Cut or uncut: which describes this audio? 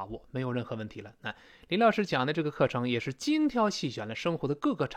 uncut